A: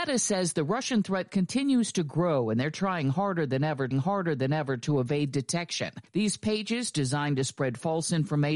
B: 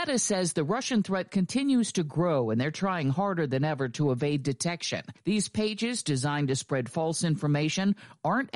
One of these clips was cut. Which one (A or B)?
A